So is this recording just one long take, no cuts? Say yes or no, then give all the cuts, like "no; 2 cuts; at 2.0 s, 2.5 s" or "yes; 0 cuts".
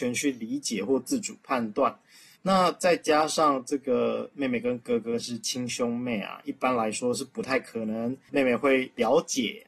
no; 2 cuts; at 2.4 s, 8.3 s